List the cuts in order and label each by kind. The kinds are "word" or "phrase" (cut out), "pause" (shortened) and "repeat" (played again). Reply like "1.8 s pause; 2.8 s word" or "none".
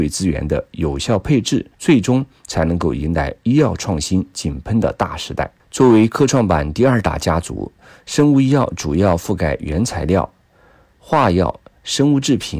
1.7 s pause; 5.6 s pause